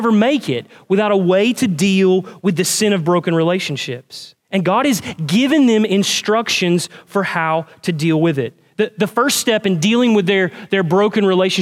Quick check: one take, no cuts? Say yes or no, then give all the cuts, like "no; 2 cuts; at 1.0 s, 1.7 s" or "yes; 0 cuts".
no; 1 cut; at 4.4 s